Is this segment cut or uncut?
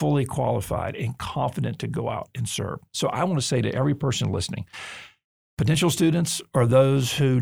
uncut